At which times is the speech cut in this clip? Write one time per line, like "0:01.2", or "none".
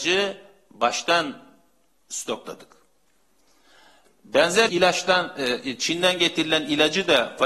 0:04.7